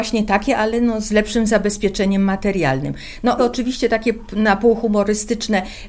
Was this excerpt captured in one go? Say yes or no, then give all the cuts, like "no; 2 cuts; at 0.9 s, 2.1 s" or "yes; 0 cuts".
no; 1 cut; at 3.4 s